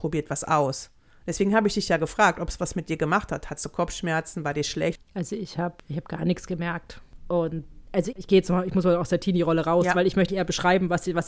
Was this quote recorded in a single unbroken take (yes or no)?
no